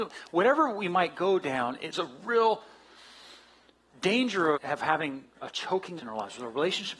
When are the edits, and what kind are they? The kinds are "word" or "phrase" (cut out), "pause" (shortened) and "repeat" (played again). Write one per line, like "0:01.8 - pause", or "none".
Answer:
0:01.9 - word
0:04.5 - word
0:06.0 - word